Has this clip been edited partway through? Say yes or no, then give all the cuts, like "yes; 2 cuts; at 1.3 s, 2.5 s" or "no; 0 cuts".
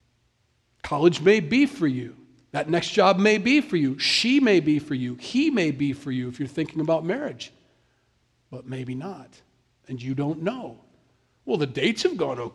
no; 0 cuts